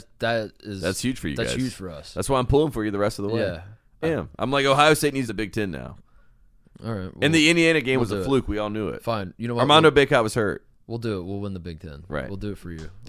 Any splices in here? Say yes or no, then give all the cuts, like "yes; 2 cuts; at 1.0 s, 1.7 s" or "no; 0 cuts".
yes; 2 cuts; at 4.0 s, 5.3 s